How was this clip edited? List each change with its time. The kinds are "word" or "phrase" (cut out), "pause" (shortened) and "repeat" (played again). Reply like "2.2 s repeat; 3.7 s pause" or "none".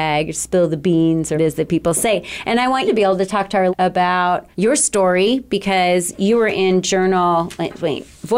1.3 s word; 2.9 s word; 3.7 s word; 4.5 s pause